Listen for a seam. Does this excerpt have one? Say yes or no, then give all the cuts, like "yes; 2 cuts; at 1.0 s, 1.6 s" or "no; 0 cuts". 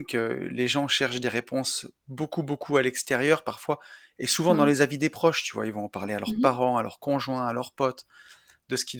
no; 0 cuts